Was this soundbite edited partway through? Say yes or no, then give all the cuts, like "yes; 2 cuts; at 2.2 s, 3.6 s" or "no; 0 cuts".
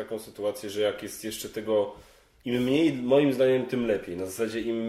no; 0 cuts